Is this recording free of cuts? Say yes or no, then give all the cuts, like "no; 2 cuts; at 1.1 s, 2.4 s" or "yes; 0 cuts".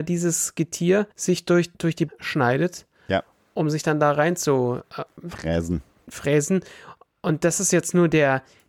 no; 3 cuts; at 1.1 s, 1.7 s, 2.1 s